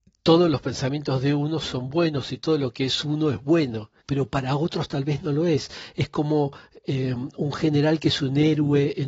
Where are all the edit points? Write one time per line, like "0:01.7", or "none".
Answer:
0:04.0